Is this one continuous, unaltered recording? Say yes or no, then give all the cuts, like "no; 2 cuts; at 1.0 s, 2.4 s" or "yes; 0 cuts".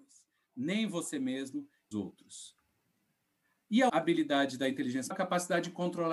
no; 3 cuts; at 1.9 s, 3.9 s, 5.1 s